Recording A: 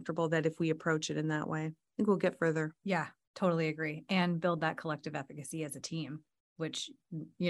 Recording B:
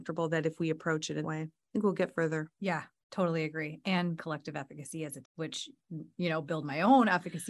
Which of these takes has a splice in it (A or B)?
B